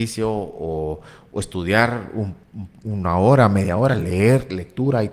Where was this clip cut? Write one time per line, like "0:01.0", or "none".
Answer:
none